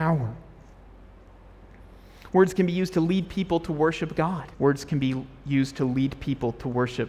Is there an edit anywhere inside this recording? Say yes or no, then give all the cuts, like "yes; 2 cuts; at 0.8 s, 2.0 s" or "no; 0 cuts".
yes; 1 cut; at 4.5 s